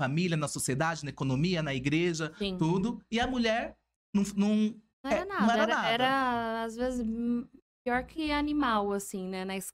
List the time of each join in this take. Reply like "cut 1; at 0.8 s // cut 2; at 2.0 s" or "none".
cut 1; at 4.9 s